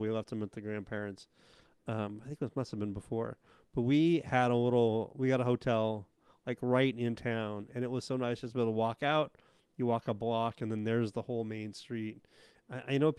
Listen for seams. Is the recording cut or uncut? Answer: uncut